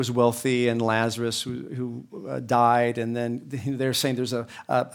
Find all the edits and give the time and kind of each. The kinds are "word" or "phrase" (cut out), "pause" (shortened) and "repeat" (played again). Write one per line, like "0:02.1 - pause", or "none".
none